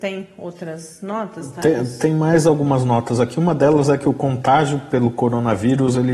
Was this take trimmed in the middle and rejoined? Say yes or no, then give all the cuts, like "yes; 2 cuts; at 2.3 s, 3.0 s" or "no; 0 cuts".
no; 0 cuts